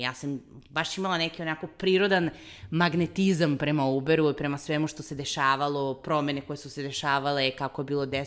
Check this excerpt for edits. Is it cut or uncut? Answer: uncut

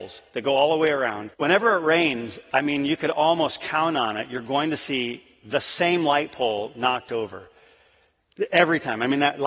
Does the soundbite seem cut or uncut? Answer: cut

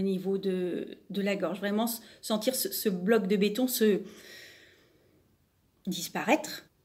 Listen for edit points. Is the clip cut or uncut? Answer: uncut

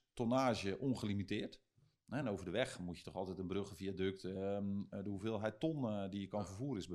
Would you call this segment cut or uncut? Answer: uncut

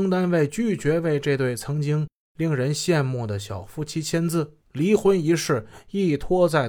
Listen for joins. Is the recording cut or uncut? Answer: cut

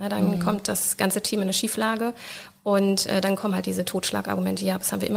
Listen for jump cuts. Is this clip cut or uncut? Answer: uncut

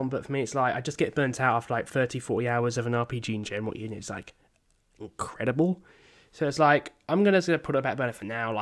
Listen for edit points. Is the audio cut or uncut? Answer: uncut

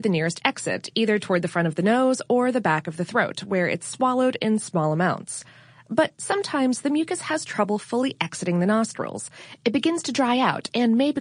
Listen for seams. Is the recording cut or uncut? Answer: uncut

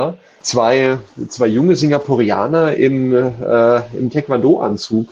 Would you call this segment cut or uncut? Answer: uncut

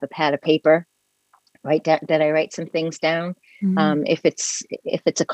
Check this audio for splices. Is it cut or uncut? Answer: uncut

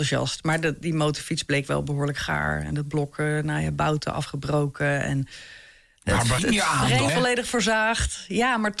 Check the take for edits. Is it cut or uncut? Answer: cut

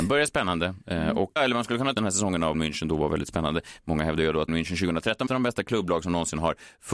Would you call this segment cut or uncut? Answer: cut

